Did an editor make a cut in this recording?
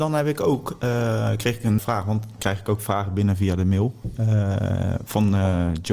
yes; 2 cuts; at 1.8 s, 2.4 s

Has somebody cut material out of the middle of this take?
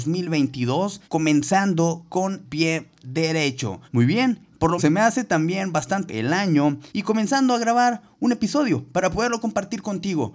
yes; 6 cuts; at 1.0 s, 2.4 s, 3.8 s, 4.8 s, 6.1 s, 6.9 s

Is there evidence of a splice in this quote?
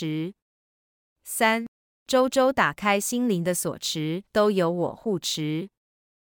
yes; 1 cut; at 4.3 s

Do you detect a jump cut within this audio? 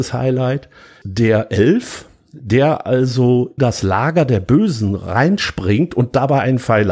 yes; 1 cut; at 3.6 s

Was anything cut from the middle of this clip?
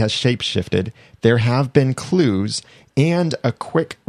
no; 0 cuts

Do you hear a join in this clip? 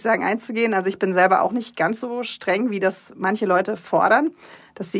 no; 0 cuts

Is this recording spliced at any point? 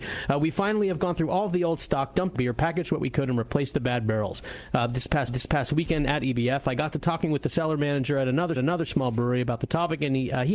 yes; 3 cuts; at 2.3 s, 5.3 s, 8.6 s

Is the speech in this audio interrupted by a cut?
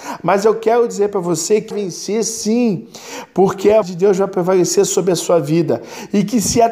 yes; 2 cuts; at 1.7 s, 3.8 s

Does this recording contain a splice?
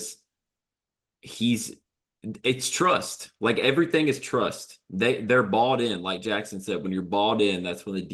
no; 0 cuts

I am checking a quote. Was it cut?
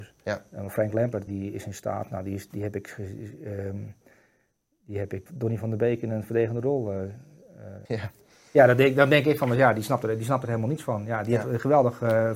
yes; 3 cuts; at 1.3 s, 5.3 s, 7.9 s

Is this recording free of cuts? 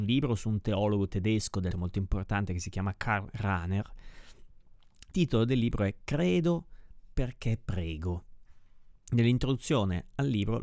no; 3 cuts; at 1.7 s, 5.1 s, 9.0 s

